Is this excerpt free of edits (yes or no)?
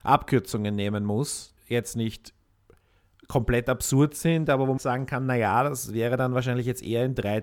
no